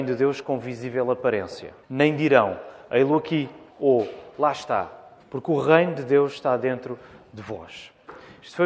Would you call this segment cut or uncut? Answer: cut